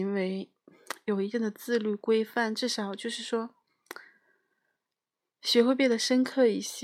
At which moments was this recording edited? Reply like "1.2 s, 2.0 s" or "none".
none